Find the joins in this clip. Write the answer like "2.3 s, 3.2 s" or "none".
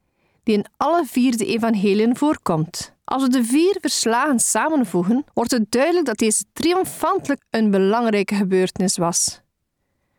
3.0 s, 5.3 s, 7.4 s